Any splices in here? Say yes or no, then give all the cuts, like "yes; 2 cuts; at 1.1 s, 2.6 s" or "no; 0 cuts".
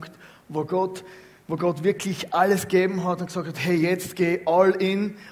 no; 0 cuts